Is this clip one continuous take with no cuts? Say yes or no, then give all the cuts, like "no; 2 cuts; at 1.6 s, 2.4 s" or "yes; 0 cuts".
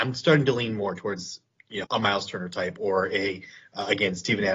no; 1 cut; at 1.8 s